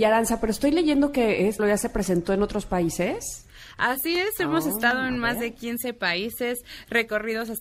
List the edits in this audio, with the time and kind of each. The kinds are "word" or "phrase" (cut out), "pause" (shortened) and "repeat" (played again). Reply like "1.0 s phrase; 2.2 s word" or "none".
1.6 s word